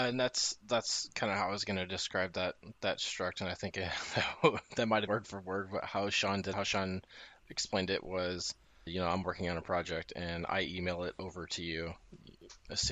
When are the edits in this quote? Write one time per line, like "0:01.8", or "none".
0:05.1
0:06.5
0:08.9